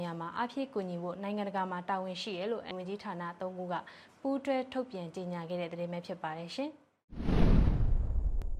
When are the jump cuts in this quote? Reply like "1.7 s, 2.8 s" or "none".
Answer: 2.7 s